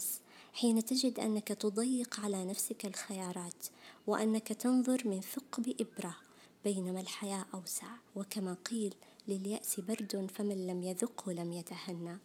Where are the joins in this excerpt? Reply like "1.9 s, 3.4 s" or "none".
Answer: 8.1 s